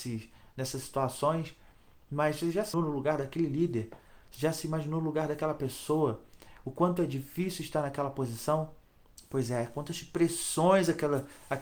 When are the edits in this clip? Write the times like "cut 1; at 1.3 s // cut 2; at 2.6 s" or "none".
cut 1; at 2.7 s